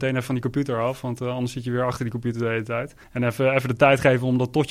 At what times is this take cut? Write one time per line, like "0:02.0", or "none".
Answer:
0:03.0